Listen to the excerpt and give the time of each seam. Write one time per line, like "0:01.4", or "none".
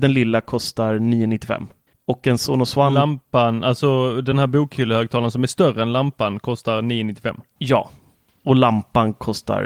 none